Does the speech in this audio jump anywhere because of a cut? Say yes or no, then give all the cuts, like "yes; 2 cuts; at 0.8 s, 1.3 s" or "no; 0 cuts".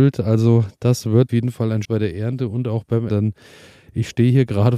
yes; 3 cuts; at 1.3 s, 1.8 s, 3.1 s